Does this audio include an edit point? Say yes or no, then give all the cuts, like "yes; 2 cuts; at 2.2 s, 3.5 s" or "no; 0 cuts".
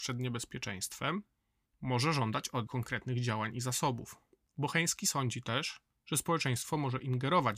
yes; 1 cut; at 2.7 s